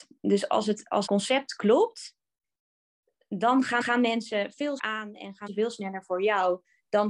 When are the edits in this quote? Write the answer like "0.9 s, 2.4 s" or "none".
1.1 s, 3.8 s, 4.8 s, 5.5 s